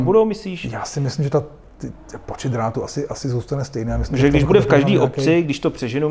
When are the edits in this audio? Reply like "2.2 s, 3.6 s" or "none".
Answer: none